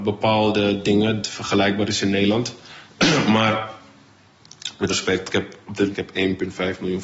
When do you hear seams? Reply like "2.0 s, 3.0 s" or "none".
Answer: 1.2 s, 4.9 s, 5.3 s, 5.9 s